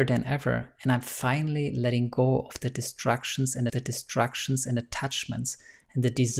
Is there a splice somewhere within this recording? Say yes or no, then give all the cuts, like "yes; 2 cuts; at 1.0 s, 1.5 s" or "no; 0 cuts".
yes; 1 cut; at 3.7 s